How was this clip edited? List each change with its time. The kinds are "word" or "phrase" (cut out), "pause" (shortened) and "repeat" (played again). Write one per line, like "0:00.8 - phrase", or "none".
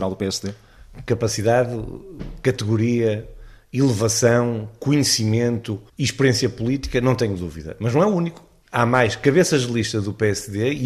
0:05.9 - pause